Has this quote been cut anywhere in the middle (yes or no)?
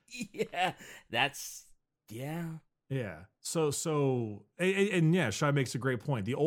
no